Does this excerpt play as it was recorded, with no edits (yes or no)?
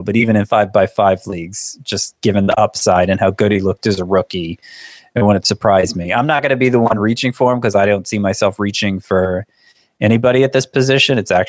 yes